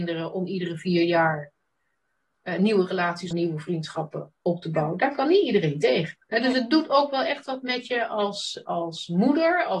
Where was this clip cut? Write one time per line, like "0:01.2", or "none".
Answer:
0:03.3
0:06.2